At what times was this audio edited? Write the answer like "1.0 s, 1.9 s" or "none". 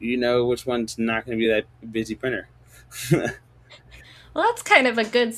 none

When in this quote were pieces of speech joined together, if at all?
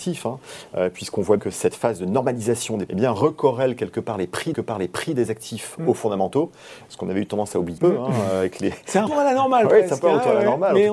1.4 s, 2.9 s, 4.5 s, 7.8 s, 9.1 s

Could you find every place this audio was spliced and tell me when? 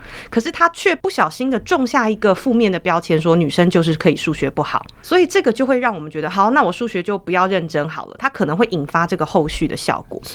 none

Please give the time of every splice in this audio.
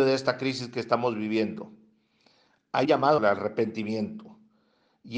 2.8 s, 3.2 s

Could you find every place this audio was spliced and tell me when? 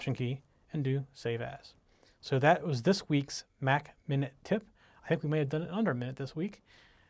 none

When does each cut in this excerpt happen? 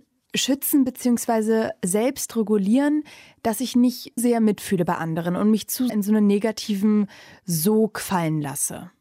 4.2 s, 5.9 s

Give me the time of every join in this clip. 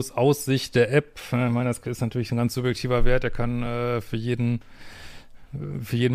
none

